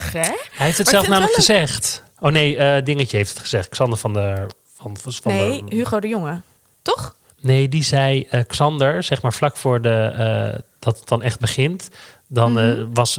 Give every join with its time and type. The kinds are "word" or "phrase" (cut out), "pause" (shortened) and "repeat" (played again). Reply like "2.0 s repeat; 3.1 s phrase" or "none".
2.1 s pause; 6.6 s pause